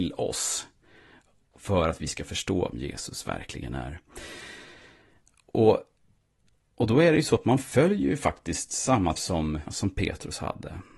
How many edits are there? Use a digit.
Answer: 3